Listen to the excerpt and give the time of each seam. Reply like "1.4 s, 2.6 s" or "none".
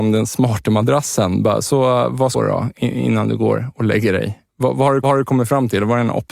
2.3 s, 4.5 s, 5.0 s